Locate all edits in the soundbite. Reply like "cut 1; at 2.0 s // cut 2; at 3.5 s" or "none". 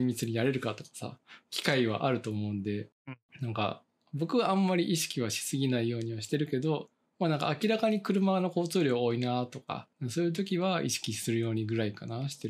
none